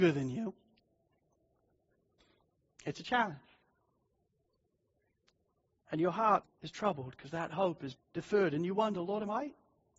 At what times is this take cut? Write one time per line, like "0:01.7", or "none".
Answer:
0:06.4
0:08.0